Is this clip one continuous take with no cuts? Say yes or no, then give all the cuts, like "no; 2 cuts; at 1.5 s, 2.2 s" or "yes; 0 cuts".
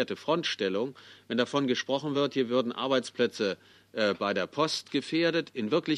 yes; 0 cuts